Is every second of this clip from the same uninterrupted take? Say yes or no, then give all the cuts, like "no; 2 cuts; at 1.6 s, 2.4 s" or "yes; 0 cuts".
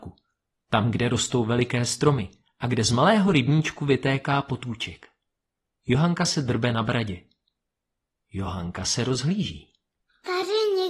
yes; 0 cuts